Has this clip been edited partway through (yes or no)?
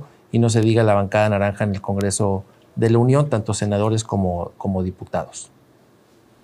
no